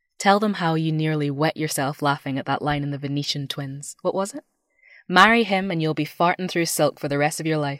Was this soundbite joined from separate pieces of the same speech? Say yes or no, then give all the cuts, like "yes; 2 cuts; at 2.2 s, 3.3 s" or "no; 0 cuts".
no; 0 cuts